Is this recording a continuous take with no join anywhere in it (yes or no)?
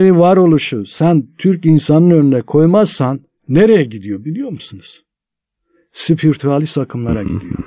yes